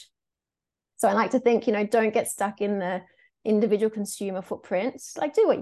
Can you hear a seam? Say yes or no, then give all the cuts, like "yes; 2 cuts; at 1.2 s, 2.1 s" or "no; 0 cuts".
no; 0 cuts